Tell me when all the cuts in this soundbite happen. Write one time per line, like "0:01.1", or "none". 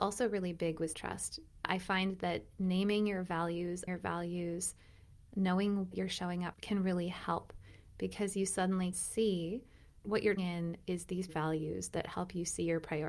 0:00.9
0:03.9
0:05.9
0:06.5
0:08.9
0:10.0
0:10.4
0:11.3